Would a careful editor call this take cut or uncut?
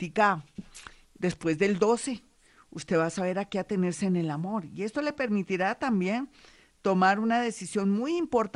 uncut